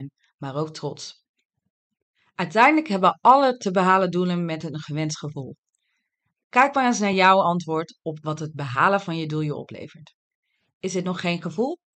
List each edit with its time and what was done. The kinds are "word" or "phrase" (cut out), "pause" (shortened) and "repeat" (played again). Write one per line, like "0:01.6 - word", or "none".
none